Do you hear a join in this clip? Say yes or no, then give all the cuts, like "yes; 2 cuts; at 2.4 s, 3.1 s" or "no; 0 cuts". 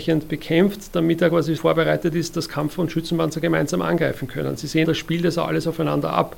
yes; 2 cuts; at 1.6 s, 4.8 s